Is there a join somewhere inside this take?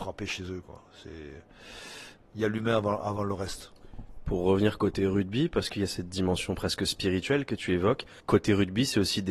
yes; 1 cut; at 8.2 s

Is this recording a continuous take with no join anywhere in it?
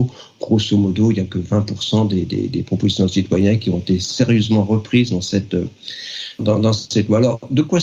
no; 1 cut; at 6.4 s

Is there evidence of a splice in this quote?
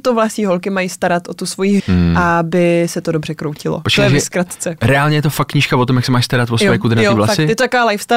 yes; 1 cut; at 1.8 s

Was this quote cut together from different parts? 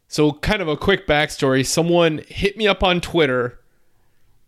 no; 0 cuts

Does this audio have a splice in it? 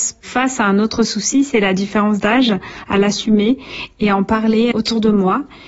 yes; 1 cut; at 4.7 s

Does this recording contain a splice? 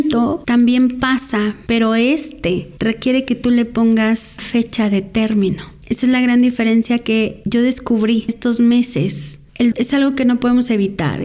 yes; 3 cuts; at 4.4 s, 8.3 s, 9.7 s

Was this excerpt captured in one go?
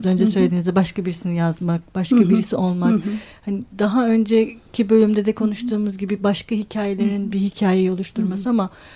yes; 0 cuts

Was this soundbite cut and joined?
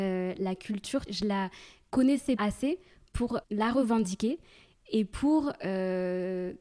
yes; 3 cuts; at 1.1 s, 2.4 s, 3.4 s

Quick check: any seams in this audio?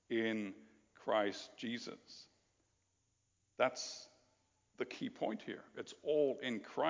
no; 0 cuts

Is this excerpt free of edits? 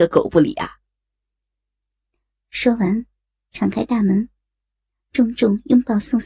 yes; 0 cuts

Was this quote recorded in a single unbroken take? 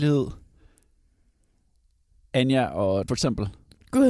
no; 1 cut; at 3.1 s

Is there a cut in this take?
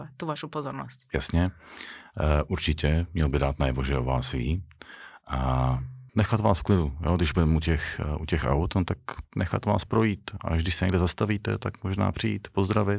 yes; 1 cut; at 6.1 s

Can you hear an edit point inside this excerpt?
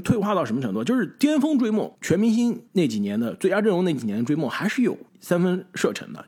yes; 3 cuts; at 1.9 s, 2.7 s, 5.1 s

